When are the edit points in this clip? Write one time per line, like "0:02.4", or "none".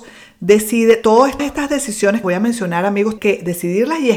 0:01.4
0:02.2
0:03.2